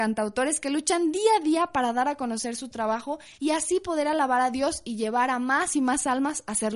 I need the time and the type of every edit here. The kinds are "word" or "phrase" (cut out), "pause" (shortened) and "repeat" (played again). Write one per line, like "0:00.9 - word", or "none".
0:03.3 - pause